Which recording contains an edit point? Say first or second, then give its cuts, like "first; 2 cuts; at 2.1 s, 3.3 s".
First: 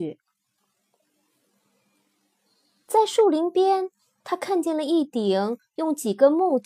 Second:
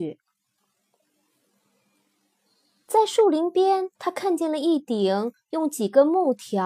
second; 1 cut; at 4.0 s